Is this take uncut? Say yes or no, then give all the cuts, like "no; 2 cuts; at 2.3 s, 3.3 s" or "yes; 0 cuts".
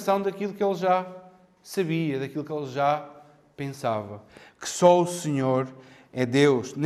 yes; 0 cuts